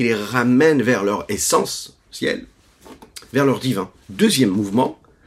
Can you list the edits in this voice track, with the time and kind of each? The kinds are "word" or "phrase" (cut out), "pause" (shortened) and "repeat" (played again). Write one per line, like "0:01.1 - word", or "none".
0:04.0 - pause